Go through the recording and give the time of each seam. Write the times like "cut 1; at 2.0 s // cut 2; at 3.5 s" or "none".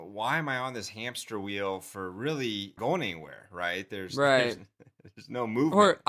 cut 1; at 2.8 s